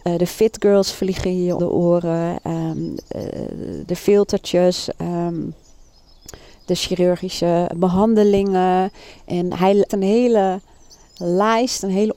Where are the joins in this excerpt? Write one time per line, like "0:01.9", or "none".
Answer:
0:01.6
0:07.7
0:09.9